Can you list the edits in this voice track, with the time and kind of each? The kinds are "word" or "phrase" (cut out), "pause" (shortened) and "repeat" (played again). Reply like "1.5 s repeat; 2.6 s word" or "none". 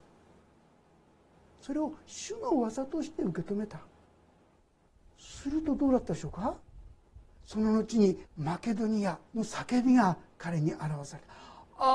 4.2 s pause; 8.3 s pause; 9.3 s pause